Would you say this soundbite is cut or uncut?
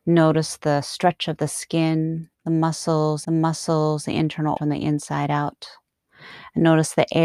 cut